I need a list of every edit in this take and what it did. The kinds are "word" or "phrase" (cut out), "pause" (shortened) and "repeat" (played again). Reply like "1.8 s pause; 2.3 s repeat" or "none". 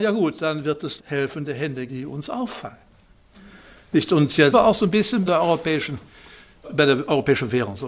1.0 s word; 1.9 s word; 4.5 s word; 5.3 s word; 6.6 s word